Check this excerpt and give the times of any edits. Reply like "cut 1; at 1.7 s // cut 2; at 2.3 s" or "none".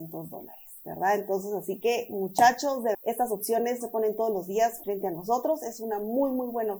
cut 1; at 2.9 s // cut 2; at 3.8 s // cut 3; at 4.8 s

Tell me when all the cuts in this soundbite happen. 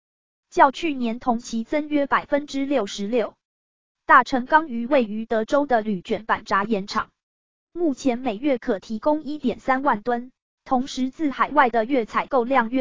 cut 1; at 10.4 s

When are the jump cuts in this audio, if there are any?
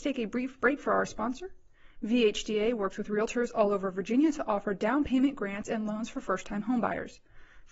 none

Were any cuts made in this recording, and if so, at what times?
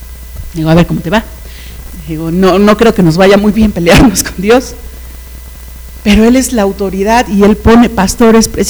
none

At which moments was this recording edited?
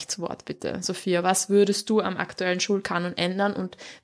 none

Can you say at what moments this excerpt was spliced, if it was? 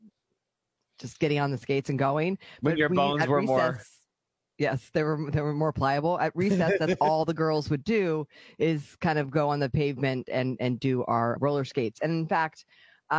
cut 1; at 11.4 s

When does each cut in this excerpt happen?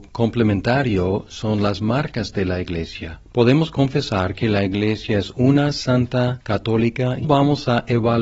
cut 1; at 7.2 s

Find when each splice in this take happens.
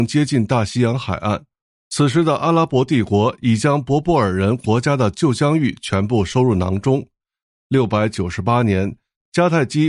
none

